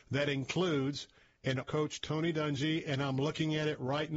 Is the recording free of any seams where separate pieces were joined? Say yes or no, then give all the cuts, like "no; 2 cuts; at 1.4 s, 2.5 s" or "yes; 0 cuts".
no; 1 cut; at 1.6 s